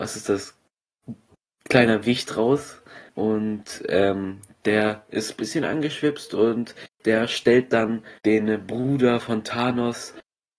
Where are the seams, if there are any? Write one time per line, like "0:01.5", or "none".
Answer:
0:01.5
0:03.1
0:08.2